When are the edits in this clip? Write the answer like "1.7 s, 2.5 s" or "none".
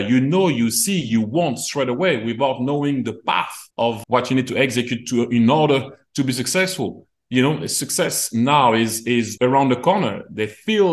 3.7 s, 9.4 s